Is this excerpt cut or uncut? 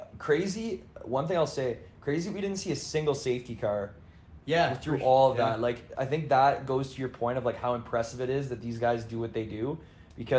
uncut